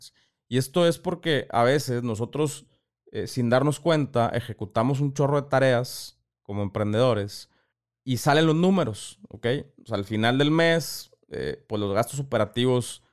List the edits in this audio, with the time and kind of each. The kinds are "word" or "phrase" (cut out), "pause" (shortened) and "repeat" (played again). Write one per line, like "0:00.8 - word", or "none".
none